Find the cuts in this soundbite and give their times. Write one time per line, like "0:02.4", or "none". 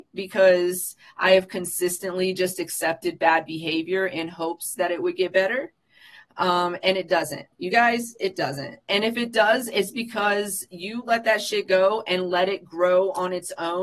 none